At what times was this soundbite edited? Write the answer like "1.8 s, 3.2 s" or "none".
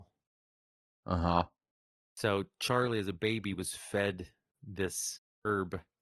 none